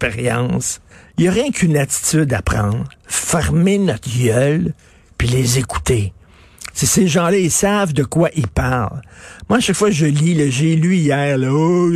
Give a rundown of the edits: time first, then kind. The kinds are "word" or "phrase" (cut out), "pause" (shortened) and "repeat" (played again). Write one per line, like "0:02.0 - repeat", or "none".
0:00.9 - pause